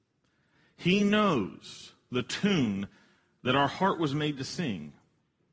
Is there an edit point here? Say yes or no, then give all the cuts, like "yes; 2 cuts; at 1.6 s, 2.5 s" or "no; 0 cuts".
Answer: no; 0 cuts